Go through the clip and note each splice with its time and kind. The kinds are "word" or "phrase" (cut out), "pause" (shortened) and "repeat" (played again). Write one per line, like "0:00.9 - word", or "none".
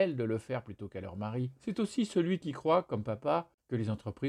none

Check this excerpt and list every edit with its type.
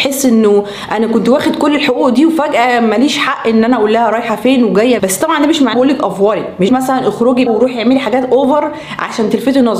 0:05.0 - word
0:05.7 - word
0:06.7 - word
0:07.5 - word

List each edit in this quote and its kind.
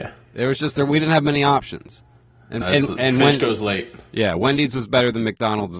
0:02.6 - word

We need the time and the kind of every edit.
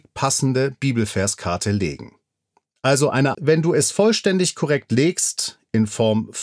0:03.3 - phrase

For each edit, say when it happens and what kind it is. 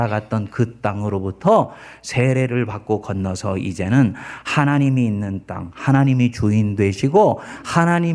none

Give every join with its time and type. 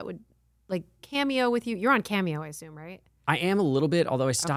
0:01.0 - phrase

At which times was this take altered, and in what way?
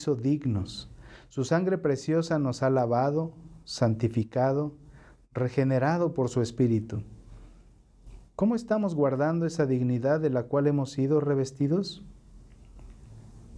none

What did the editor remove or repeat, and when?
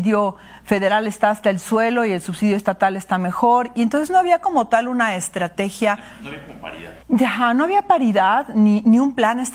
0:07.0 - pause

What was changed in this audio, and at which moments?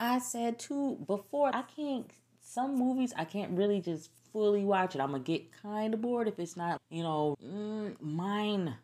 0:01.5 - word
0:06.8 - word
0:07.3 - word

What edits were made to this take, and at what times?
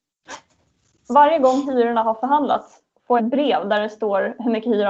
0:03.2 - word

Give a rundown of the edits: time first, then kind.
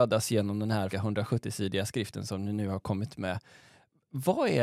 0:00.9 - word
0:03.1 - word

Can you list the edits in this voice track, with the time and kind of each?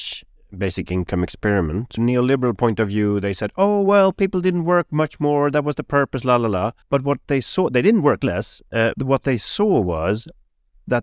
0:02.0 - phrase
0:06.8 - pause
0:08.9 - word

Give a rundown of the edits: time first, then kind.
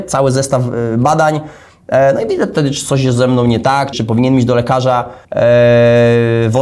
0:03.9 - word
0:05.2 - pause

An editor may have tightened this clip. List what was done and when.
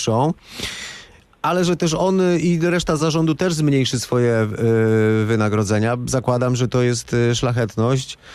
none

